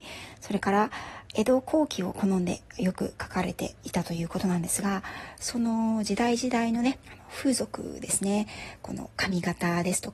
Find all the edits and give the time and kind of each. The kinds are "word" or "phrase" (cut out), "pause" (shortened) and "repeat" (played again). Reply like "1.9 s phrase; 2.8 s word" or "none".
7.0 s pause; 9.1 s pause